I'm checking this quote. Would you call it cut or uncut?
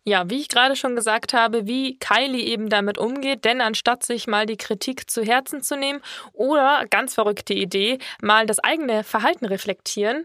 uncut